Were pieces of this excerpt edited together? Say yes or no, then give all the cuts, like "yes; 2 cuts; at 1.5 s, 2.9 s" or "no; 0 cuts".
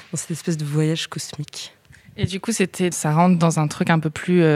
yes; 1 cut; at 2.9 s